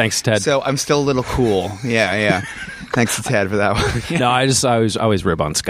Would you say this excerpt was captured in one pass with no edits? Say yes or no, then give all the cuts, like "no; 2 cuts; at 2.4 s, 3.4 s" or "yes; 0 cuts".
yes; 0 cuts